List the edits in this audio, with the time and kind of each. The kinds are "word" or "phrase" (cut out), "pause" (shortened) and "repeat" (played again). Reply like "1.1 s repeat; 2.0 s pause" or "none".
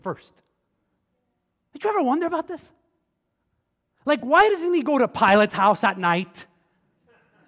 none